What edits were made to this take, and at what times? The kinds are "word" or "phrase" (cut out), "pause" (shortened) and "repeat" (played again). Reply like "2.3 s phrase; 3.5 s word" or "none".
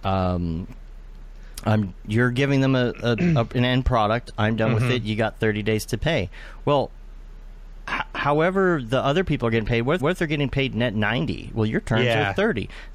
10.0 s repeat